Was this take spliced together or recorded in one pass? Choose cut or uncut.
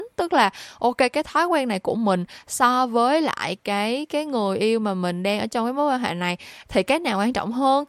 uncut